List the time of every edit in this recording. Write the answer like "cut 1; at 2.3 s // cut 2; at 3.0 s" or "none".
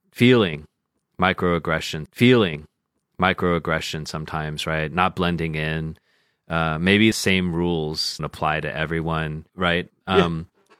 cut 1; at 2.1 s // cut 2; at 7.1 s // cut 3; at 8.2 s // cut 4; at 9.5 s